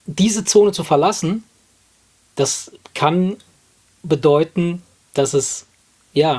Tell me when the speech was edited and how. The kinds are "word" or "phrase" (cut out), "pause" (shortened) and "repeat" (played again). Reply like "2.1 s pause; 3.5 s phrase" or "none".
none